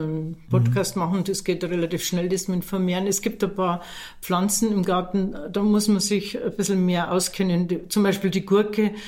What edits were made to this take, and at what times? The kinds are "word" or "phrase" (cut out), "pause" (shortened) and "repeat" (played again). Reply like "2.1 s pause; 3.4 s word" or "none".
none